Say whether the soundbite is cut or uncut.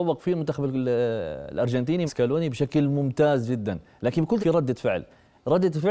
cut